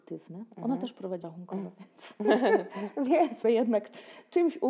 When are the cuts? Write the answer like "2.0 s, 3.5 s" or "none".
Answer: 1.2 s, 3.4 s